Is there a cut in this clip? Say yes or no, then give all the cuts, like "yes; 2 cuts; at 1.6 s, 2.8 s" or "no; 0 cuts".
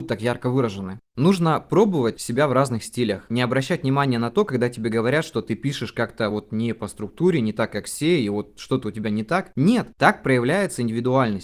no; 0 cuts